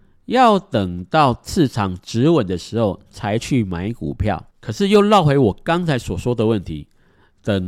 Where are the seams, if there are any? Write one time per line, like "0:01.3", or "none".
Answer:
0:04.5